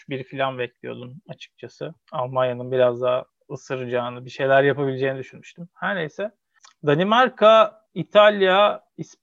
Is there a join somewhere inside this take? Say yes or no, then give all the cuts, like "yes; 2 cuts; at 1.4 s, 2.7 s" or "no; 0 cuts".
no; 0 cuts